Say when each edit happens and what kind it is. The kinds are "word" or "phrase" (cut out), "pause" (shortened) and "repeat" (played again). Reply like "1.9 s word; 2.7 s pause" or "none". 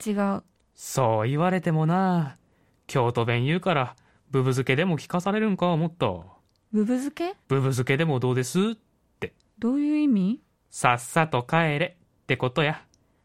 7.4 s pause; 9.5 s pause